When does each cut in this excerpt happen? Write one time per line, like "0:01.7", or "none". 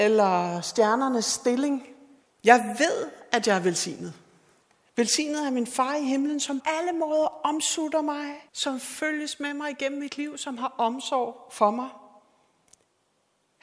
0:02.2
0:04.6
0:06.6
0:08.5